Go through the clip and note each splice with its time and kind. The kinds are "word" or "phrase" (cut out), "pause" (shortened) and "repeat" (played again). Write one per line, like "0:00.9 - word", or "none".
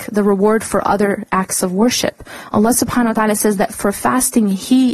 none

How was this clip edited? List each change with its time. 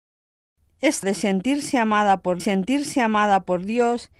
0:01.0 - word
0:02.4 - repeat

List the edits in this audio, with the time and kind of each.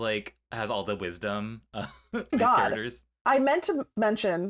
0:02.3 - phrase

